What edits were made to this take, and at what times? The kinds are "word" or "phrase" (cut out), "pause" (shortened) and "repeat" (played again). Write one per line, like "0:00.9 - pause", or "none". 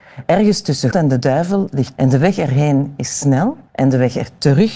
0:00.9 - word
0:02.0 - word
0:03.7 - pause